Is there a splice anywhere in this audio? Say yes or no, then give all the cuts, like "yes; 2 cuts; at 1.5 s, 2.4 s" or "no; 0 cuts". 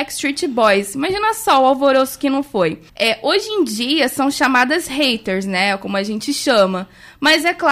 yes; 1 cut; at 2.9 s